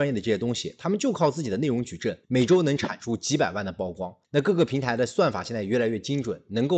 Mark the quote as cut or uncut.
cut